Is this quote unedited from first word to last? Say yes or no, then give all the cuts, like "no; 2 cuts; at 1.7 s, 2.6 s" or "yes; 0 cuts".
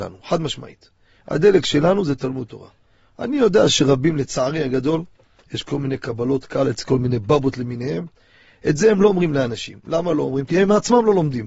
yes; 0 cuts